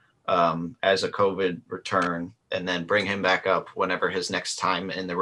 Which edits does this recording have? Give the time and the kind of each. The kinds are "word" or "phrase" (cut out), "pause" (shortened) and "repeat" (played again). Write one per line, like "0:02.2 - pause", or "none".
0:02.4 - pause